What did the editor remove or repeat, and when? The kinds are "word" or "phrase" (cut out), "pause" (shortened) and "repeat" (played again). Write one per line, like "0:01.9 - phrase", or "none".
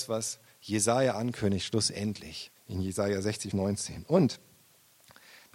0:02.6 - pause
0:03.5 - word